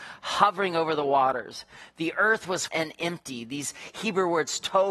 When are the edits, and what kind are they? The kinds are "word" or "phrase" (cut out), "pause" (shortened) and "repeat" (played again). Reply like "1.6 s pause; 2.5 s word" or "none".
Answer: 2.7 s word